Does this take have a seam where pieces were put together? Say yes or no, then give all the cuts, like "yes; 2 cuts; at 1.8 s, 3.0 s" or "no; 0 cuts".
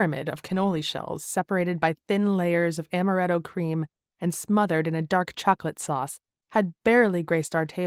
no; 0 cuts